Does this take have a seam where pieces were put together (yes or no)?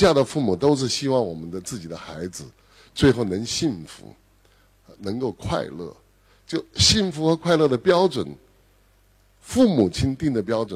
no